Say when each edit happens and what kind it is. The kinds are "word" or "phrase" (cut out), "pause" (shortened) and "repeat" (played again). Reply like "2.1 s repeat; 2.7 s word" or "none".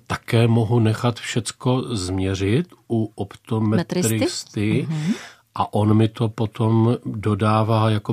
none